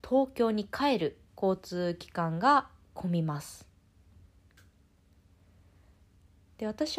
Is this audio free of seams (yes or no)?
no